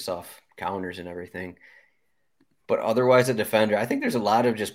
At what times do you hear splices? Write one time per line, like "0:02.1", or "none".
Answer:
none